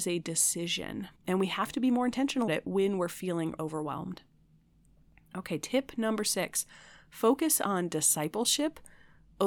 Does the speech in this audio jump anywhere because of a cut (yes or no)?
yes